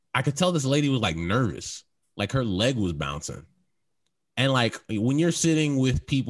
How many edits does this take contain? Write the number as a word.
zero